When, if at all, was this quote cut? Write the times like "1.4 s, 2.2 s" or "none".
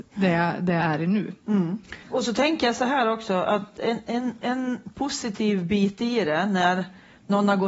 2.0 s